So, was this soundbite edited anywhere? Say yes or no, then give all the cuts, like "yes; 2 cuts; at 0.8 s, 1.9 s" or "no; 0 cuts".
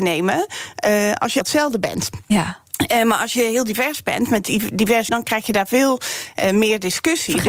yes; 2 cuts; at 1.4 s, 5.1 s